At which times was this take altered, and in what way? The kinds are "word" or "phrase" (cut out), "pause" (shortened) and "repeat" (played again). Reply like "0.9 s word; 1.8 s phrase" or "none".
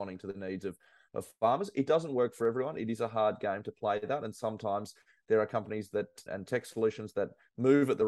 6.3 s word